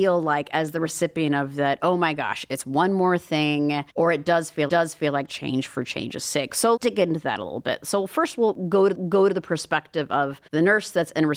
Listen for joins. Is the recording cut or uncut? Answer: cut